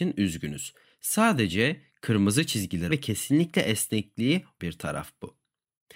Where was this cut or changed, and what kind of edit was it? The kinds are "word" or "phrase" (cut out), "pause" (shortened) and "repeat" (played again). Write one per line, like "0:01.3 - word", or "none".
0:02.9 - word
0:04.6 - word